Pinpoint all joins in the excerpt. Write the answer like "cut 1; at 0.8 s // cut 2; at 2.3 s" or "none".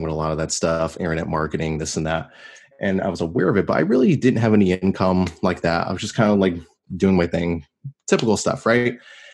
none

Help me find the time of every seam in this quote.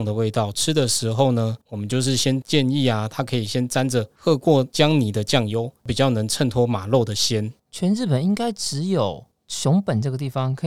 cut 1; at 1.6 s // cut 2; at 7.6 s

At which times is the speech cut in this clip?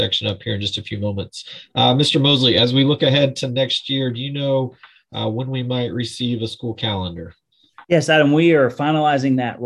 cut 1; at 7.8 s

